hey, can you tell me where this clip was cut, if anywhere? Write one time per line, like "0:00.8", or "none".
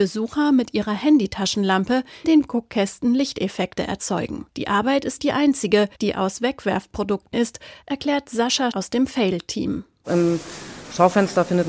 0:02.2
0:04.5
0:05.2
0:05.9
0:07.3
0:08.7